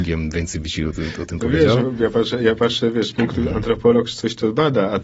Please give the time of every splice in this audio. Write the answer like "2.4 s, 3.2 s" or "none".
none